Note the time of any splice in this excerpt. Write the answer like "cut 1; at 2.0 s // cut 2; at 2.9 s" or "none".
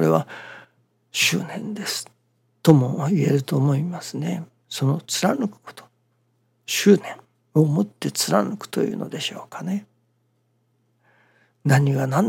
none